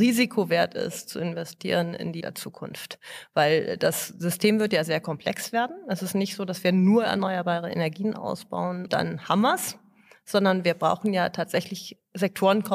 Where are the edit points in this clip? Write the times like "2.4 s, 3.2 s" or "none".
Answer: 2.2 s, 8.9 s